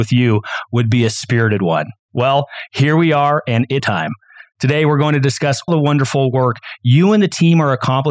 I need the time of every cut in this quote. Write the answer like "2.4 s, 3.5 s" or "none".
3.8 s, 5.7 s